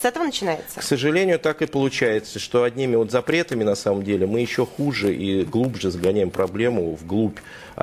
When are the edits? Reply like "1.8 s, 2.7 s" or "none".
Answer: none